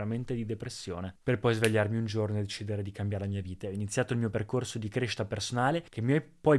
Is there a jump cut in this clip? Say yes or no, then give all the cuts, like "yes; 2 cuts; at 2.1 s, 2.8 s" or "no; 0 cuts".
no; 0 cuts